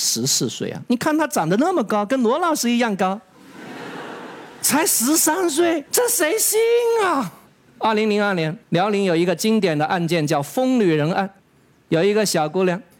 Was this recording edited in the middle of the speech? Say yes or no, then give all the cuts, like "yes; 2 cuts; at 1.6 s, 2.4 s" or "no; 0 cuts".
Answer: yes; 4 cuts; at 5.9 s, 7.5 s, 8.6 s, 11.4 s